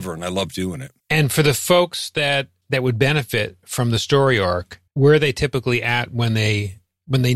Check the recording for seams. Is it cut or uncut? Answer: cut